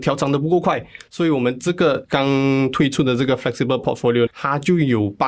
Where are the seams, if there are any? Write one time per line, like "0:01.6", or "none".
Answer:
0:04.3